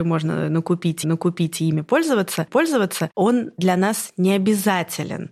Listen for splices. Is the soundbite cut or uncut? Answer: cut